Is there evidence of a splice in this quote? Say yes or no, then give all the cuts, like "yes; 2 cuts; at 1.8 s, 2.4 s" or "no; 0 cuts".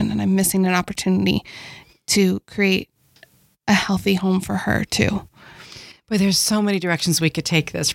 no; 0 cuts